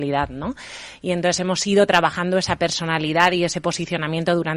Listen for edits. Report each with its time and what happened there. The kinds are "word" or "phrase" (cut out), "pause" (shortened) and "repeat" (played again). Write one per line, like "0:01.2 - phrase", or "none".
none